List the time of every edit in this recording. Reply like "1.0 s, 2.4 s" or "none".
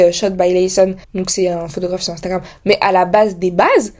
1.0 s